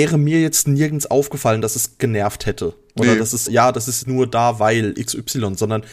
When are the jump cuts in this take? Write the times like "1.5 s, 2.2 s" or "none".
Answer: 3.5 s, 4.0 s